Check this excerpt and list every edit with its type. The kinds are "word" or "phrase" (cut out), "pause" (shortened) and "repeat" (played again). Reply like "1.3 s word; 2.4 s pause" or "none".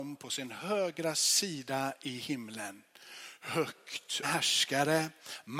4.2 s phrase